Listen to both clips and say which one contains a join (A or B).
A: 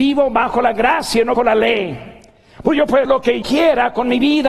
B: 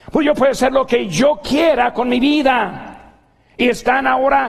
A